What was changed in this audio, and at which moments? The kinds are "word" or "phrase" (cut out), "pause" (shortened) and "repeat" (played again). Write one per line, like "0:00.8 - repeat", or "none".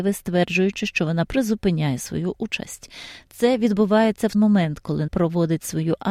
0:01.3 - word
0:04.3 - word
0:05.1 - word